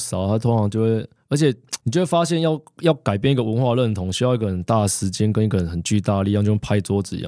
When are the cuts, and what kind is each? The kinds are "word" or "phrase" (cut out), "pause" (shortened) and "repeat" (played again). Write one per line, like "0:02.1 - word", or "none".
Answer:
0:01.8 - pause